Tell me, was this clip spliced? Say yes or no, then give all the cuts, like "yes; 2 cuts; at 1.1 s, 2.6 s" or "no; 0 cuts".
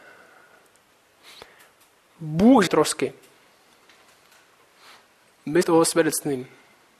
yes; 2 cuts; at 2.7 s, 5.6 s